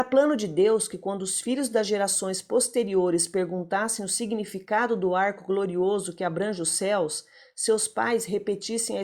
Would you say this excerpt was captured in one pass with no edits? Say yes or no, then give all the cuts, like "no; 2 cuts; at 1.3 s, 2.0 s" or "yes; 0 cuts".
yes; 0 cuts